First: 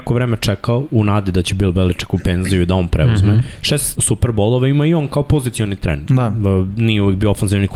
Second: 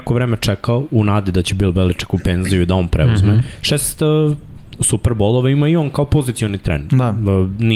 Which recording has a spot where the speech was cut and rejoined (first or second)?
first